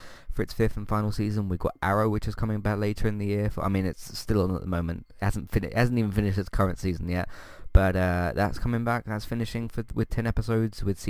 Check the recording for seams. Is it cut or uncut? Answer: uncut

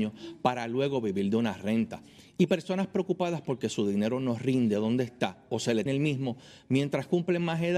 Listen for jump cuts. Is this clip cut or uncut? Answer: cut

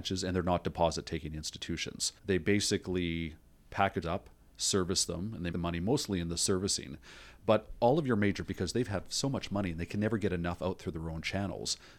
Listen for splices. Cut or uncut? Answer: cut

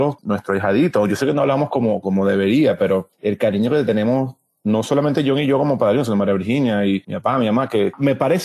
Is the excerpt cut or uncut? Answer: uncut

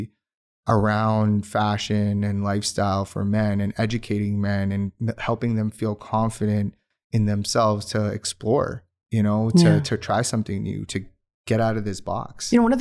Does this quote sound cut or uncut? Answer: uncut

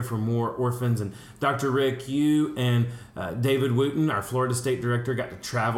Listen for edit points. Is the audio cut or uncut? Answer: uncut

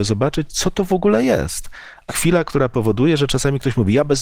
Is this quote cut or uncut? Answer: cut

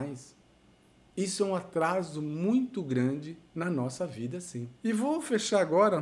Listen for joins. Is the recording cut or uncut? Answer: cut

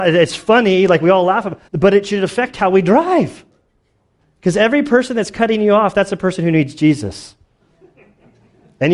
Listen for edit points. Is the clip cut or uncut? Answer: cut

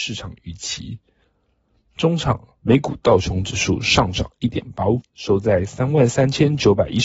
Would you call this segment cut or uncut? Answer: cut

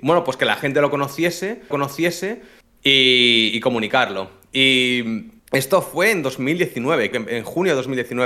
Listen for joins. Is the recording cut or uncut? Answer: cut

